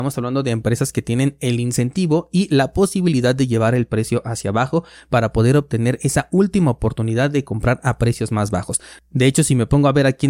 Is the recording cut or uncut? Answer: uncut